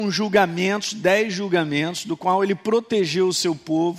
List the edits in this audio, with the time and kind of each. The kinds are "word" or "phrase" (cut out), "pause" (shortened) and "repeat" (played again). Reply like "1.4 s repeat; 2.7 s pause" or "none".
none